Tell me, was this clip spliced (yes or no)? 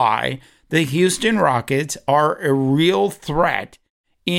no